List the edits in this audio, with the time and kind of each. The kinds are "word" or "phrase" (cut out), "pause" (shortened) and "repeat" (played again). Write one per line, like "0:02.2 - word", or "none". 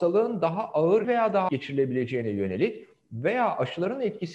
0:01.0 - word
0:01.5 - word